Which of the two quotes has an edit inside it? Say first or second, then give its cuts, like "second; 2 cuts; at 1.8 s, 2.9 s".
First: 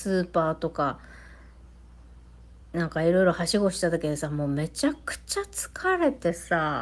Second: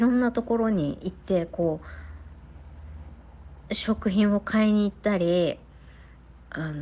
first; 1 cut; at 2.6 s